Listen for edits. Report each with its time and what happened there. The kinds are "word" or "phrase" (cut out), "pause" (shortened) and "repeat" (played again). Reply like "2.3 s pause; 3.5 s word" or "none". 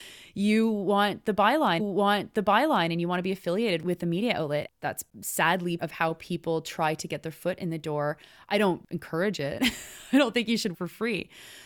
1.8 s repeat; 5.8 s word; 10.7 s word